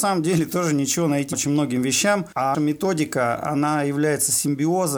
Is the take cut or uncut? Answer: cut